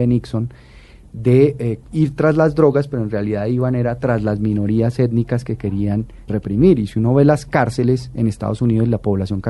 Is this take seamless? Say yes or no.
no